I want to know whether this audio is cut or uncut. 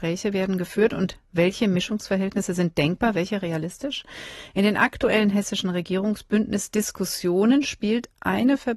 uncut